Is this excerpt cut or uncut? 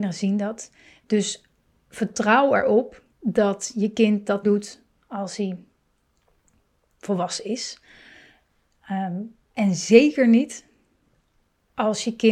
cut